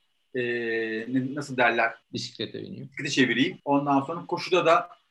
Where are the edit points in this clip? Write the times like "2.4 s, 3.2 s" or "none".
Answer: 2.0 s, 3.6 s

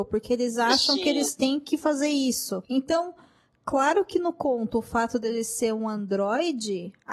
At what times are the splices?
none

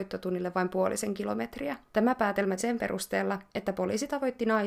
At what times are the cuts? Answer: 1.9 s, 2.6 s, 3.5 s

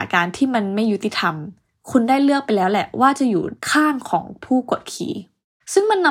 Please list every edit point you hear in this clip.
none

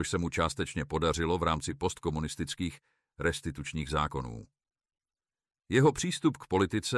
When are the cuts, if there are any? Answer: none

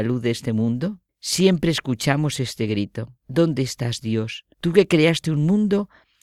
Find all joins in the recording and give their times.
1.1 s, 3.2 s, 4.5 s

